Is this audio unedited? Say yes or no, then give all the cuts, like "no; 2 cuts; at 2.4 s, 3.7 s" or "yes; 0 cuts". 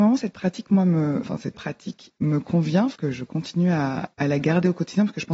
no; 3 cuts; at 1.5 s, 3.0 s, 4.1 s